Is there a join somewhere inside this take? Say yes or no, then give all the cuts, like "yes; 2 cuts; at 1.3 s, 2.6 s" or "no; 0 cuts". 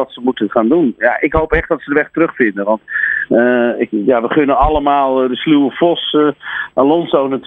no; 0 cuts